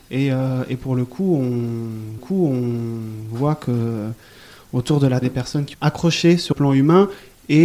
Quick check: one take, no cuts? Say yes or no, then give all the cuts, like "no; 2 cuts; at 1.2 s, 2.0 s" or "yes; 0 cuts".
no; 4 cuts; at 2.2 s, 5.2 s, 5.7 s, 6.5 s